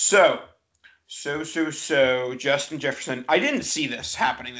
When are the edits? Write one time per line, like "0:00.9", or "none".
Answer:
none